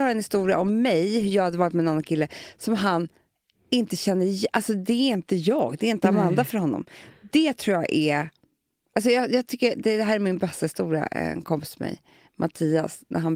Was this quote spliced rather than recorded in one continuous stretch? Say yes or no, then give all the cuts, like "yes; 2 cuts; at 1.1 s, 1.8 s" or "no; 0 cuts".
no; 0 cuts